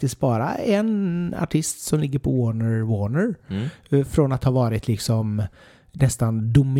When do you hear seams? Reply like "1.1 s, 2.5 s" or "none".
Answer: none